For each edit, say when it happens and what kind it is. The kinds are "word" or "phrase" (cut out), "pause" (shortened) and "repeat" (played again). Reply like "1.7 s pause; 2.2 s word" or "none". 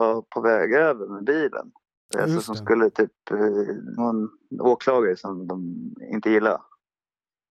2.0 s pause; 4.0 s phrase